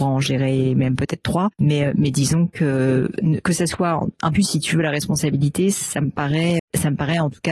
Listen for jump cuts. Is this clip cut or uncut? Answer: cut